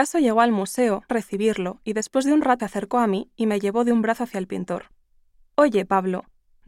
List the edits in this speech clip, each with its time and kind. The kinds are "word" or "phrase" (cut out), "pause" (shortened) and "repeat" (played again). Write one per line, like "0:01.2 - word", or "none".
0:01.1 - phrase
0:02.6 - word

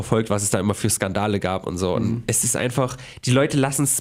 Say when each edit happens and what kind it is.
none

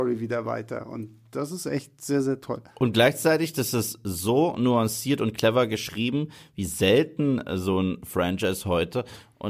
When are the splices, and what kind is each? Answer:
none

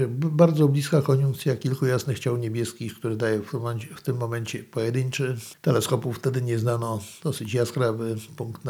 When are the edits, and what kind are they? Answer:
0:05.6 - pause

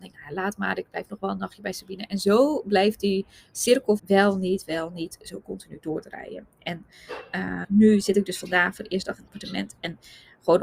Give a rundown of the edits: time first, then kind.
0:04.0 - word
0:07.6 - word
0:09.3 - word

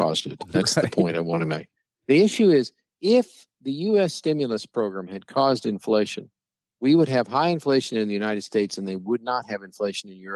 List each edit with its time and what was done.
none

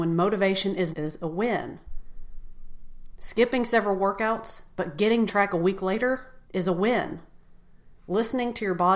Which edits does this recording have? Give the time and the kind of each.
0:00.9 - phrase
0:05.3 - phrase
0:06.4 - pause
0:08.0 - pause

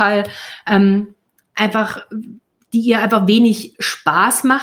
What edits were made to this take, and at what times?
none

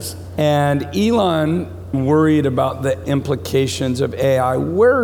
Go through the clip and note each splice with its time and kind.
0:01.9 - phrase
0:03.0 - word

